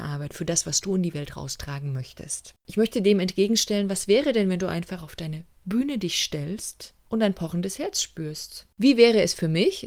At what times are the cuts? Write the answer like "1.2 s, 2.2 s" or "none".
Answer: 2.6 s, 7.0 s, 8.7 s